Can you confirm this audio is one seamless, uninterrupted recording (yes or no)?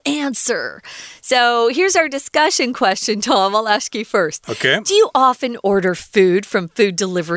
yes